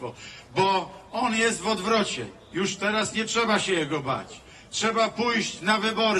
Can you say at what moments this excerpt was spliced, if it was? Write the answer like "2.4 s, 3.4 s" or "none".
none

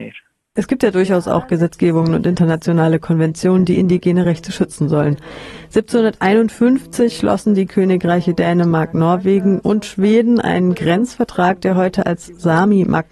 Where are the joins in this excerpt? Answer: none

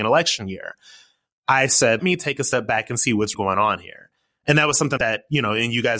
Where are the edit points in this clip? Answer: 2.0 s, 3.3 s, 5.0 s

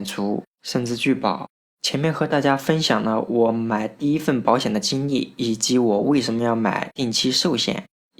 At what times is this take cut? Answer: none

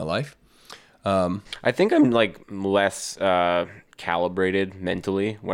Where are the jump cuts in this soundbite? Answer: 2.4 s

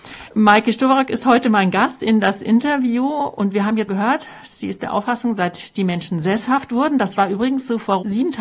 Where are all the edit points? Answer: 3.9 s

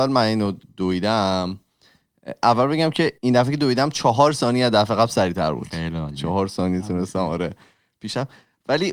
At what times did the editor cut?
3.2 s

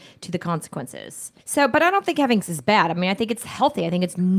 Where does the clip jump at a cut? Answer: 1.4 s, 2.4 s

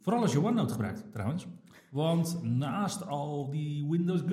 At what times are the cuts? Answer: none

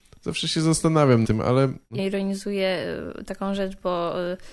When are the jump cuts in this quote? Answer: 1.2 s, 2.0 s

